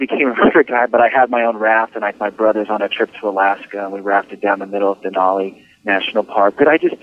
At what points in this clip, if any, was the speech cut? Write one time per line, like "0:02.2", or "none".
0:02.1
0:05.7